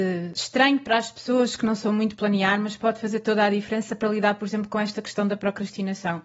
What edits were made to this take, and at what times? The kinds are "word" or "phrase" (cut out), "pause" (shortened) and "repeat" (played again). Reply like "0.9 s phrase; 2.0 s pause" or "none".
none